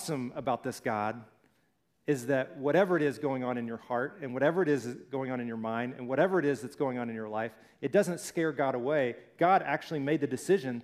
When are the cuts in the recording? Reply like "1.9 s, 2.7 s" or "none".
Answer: none